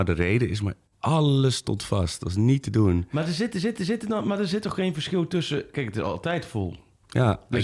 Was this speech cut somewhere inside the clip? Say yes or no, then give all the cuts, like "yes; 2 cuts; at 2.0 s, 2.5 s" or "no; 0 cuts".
yes; 1 cut; at 3.8 s